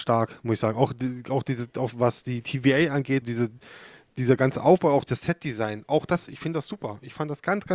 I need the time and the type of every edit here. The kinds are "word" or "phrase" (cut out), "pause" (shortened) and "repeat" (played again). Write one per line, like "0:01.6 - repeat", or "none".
0:03.2 - word
0:05.1 - word